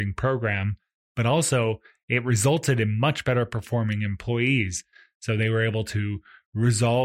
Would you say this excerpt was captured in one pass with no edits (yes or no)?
yes